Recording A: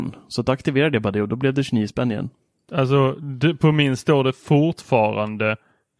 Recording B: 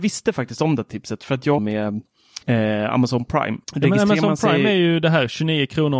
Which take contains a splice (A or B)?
B